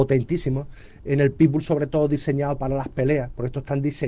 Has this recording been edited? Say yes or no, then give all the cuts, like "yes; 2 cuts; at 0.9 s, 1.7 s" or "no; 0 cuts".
no; 0 cuts